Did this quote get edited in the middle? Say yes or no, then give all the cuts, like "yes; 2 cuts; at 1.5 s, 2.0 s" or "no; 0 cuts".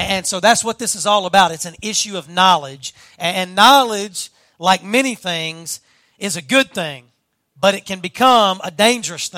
no; 0 cuts